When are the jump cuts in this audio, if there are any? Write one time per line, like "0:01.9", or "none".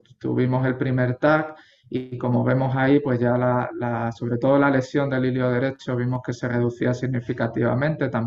none